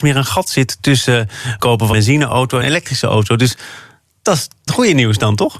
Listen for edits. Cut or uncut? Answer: cut